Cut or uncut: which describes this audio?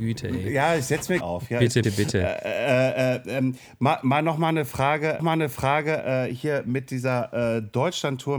cut